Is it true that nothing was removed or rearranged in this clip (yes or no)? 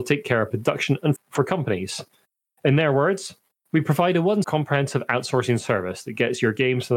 no